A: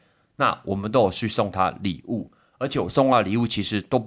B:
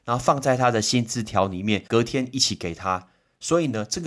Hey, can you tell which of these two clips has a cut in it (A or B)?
B